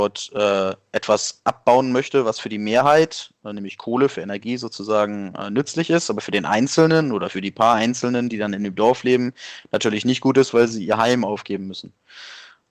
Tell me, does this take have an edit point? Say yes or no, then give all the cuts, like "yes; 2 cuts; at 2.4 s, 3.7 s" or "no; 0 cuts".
no; 0 cuts